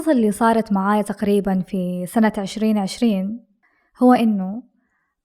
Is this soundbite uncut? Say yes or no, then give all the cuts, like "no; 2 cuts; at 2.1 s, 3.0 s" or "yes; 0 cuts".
yes; 0 cuts